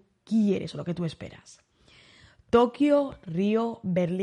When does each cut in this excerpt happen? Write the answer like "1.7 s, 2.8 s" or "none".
none